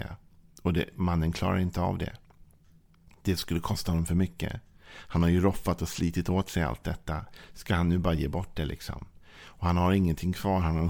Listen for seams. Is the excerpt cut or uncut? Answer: uncut